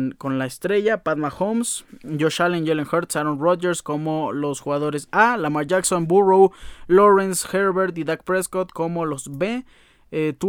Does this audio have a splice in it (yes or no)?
no